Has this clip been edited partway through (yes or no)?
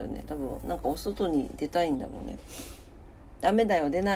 no